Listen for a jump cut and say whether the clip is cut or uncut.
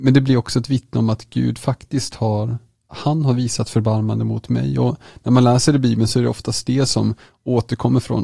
uncut